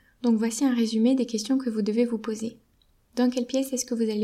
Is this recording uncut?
yes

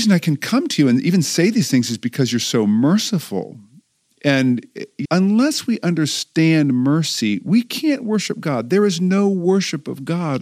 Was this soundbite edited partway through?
yes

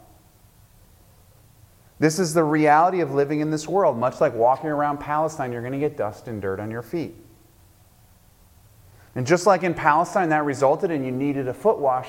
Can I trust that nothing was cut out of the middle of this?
yes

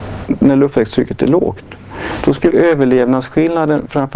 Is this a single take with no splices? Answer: no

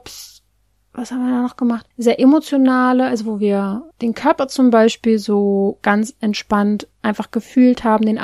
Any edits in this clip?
yes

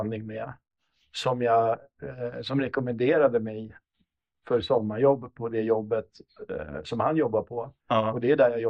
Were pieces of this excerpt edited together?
no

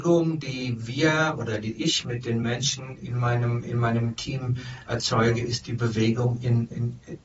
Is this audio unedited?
yes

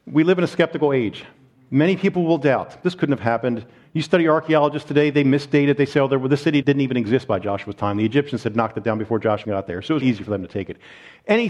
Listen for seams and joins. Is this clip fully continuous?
no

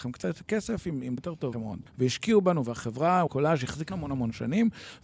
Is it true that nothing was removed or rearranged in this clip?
no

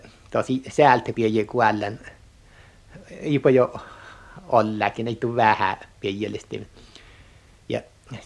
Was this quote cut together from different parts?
yes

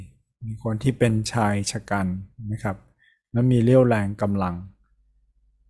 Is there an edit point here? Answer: no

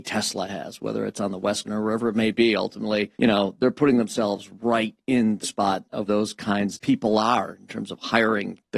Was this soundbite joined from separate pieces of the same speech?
yes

